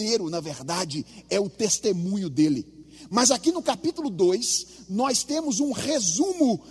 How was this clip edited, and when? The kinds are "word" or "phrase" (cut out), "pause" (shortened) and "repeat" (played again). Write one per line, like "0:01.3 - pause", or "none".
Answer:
none